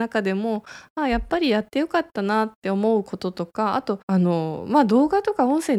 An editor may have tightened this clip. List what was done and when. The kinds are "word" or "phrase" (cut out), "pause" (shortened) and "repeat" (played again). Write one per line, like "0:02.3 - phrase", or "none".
0:04.0 - pause